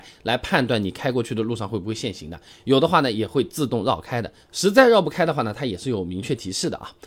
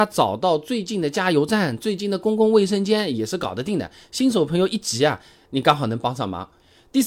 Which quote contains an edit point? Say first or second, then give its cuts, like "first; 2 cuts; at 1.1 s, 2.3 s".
second; 1 cut; at 5.4 s